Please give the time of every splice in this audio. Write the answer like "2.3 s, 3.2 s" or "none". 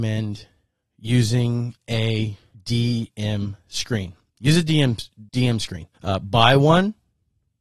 2.5 s, 5.3 s, 5.9 s